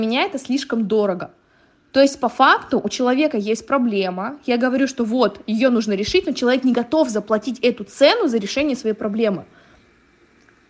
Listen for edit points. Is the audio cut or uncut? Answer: uncut